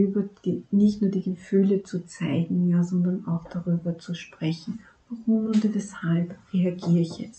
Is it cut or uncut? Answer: uncut